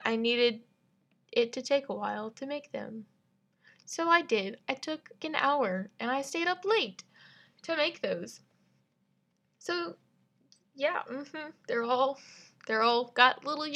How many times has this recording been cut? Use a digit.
1